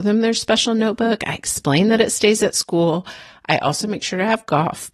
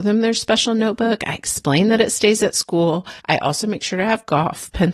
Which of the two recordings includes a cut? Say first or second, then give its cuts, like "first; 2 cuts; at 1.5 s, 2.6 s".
second; 1 cut; at 3.2 s